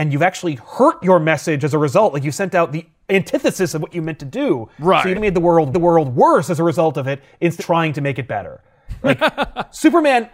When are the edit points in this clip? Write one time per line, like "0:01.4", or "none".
0:05.1
0:05.7
0:07.6